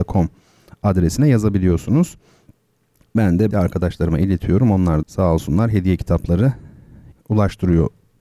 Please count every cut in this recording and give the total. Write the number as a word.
three